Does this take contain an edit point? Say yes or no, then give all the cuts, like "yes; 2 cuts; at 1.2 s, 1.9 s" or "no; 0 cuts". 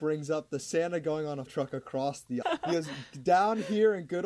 yes; 2 cuts; at 1.5 s, 2.4 s